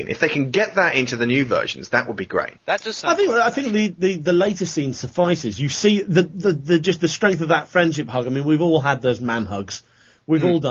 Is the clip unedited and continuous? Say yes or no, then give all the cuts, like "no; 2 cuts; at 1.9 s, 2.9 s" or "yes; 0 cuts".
no; 1 cut; at 2.6 s